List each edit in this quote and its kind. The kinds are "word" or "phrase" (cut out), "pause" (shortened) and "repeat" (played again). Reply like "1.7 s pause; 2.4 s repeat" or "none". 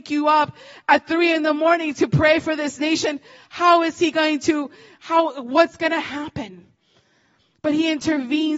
none

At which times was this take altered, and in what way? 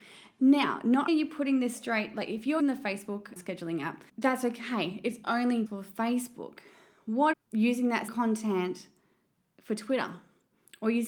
1.1 s word; 2.6 s word; 3.4 s word; 4.1 s pause; 5.7 s word; 7.3 s word; 8.1 s word

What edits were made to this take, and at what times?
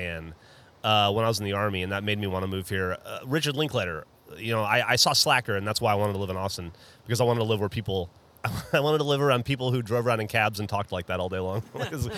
none

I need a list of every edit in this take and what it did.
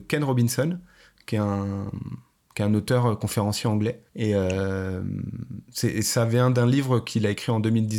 4.1 s pause

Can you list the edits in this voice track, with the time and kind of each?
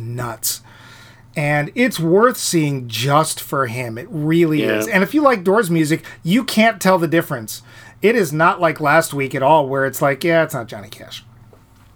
none

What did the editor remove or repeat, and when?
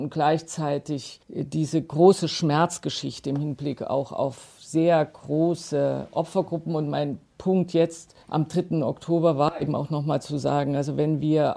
1.2 s pause; 8.2 s pause

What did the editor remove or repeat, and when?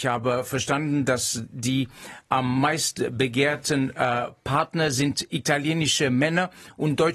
none

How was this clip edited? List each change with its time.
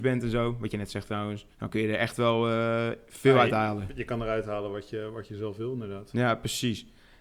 1.5 s pause

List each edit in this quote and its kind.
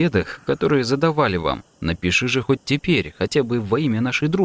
none

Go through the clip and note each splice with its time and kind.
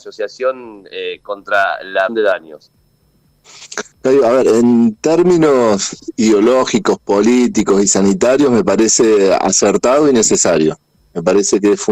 2.1 s word; 3.9 s pause

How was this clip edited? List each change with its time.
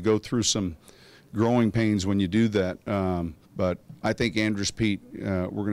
3.4 s pause

